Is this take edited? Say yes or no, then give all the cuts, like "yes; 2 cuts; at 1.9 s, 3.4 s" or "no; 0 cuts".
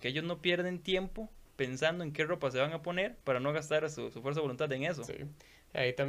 yes; 2 cuts; at 1.5 s, 3.2 s